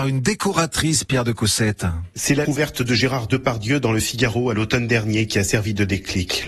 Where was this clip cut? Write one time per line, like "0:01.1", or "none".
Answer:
0:02.4